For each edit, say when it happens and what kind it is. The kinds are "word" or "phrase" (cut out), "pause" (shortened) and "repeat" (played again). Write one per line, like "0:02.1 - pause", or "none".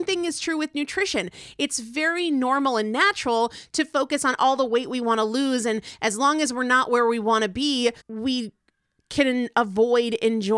0:08.0 - pause